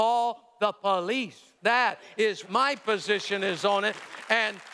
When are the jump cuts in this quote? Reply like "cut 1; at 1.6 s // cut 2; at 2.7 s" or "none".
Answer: cut 1; at 1.6 s // cut 2; at 2.4 s

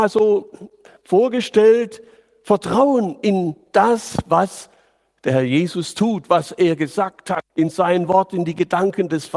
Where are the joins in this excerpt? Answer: cut 1; at 7.5 s

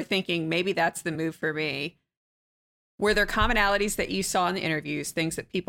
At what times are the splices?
none

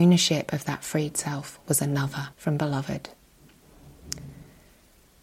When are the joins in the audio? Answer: cut 1; at 2.3 s

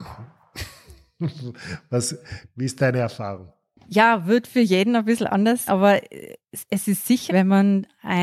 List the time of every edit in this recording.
cut 1; at 5.7 s // cut 2; at 7.3 s

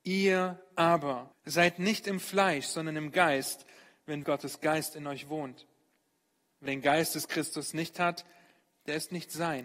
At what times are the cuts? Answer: cut 1; at 1.3 s // cut 2; at 4.2 s // cut 3; at 6.7 s

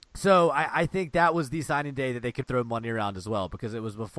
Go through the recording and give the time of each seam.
cut 1; at 2.4 s

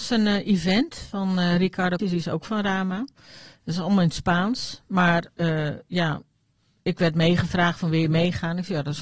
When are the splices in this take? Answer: cut 1; at 2.0 s

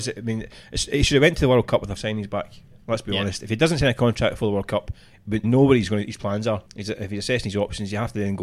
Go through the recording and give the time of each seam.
cut 1; at 2.0 s // cut 2; at 5.4 s // cut 3; at 6.7 s

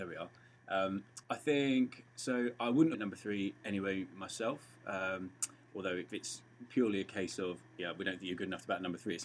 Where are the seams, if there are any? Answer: cut 1; at 1.2 s // cut 2; at 2.9 s // cut 3; at 6.1 s

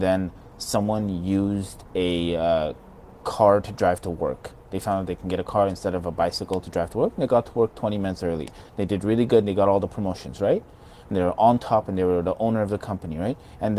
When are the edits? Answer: none

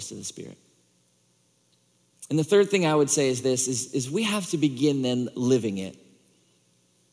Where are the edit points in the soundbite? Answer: none

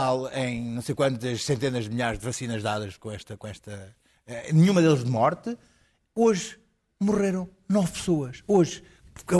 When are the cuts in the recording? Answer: none

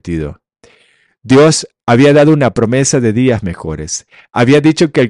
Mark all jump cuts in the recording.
none

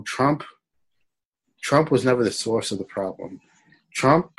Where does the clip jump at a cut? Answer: none

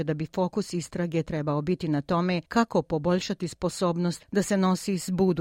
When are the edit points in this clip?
cut 1; at 2.4 s // cut 2; at 4.2 s

